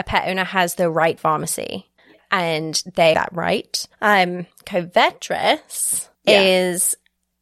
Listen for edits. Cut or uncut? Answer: cut